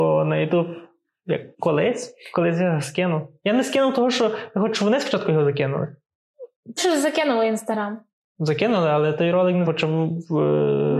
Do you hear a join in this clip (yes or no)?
yes